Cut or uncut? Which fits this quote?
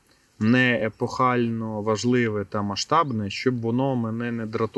uncut